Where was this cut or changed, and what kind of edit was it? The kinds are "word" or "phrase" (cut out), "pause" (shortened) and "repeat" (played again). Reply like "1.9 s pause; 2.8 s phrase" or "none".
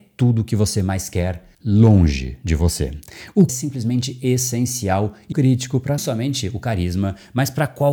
1.5 s pause; 3.5 s phrase; 5.3 s word; 6.0 s word